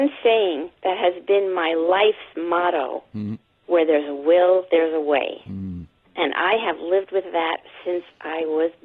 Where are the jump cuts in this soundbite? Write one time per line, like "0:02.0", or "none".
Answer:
none